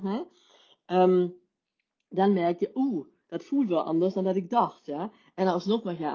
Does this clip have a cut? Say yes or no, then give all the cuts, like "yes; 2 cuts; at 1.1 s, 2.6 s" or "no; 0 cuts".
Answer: no; 0 cuts